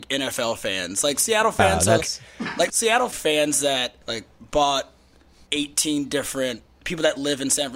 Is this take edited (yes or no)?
yes